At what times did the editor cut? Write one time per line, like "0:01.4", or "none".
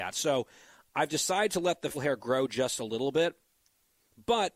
0:01.9